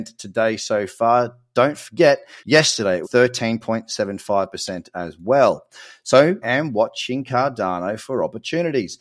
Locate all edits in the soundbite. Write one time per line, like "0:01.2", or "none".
0:02.4
0:03.0
0:06.4